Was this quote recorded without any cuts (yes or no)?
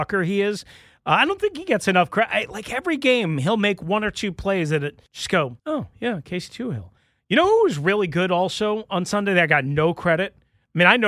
no